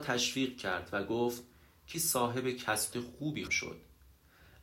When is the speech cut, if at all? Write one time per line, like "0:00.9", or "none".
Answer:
0:01.9
0:02.9
0:03.5